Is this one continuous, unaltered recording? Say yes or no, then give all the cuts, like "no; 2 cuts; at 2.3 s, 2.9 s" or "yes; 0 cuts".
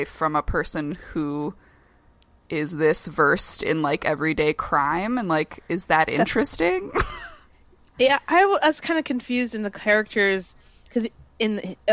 yes; 0 cuts